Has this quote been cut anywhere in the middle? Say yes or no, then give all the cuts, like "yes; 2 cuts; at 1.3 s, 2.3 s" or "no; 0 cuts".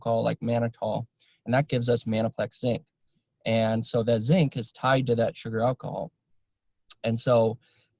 no; 0 cuts